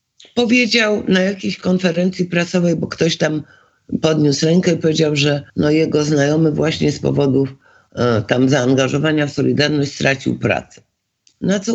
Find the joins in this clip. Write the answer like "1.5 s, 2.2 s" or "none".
5.5 s